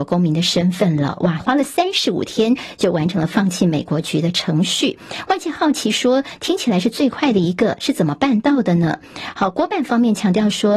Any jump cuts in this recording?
yes; 1 cut; at 1.4 s

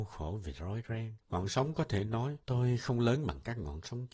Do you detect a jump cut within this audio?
yes; 2 cuts; at 1.2 s, 2.4 s

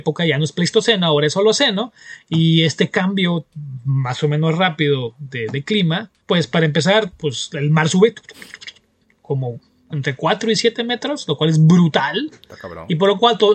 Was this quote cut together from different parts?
yes; 1 cut; at 6.2 s

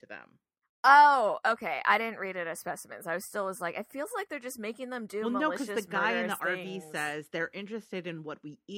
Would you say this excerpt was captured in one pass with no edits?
yes; 0 cuts

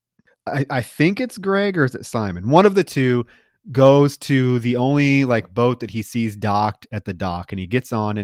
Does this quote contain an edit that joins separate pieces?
no; 0 cuts

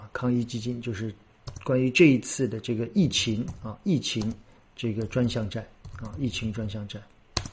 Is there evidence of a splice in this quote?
yes; 1 cut; at 4.6 s

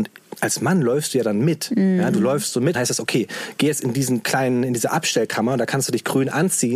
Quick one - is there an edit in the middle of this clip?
yes; 1 cut; at 2.7 s

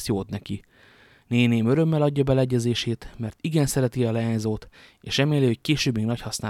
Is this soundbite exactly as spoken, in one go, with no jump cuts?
yes; 0 cuts

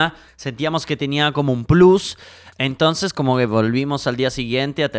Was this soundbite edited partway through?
no; 0 cuts

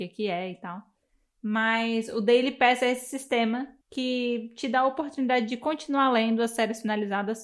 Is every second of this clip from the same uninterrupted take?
no; 1 cut; at 3.8 s

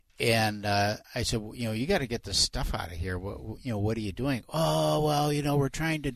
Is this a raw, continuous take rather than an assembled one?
no; 1 cut; at 1.0 s

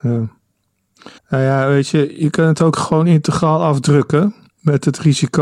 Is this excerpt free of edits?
no; 1 cut; at 1.2 s

